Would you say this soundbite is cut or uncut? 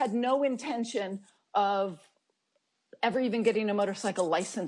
uncut